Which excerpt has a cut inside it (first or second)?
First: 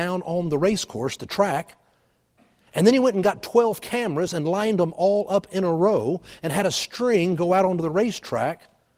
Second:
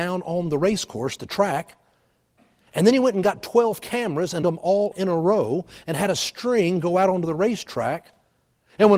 second